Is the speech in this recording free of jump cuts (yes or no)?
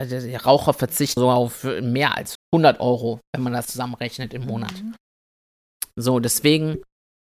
no